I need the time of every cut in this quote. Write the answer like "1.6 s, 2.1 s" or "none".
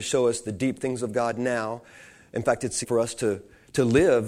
2.8 s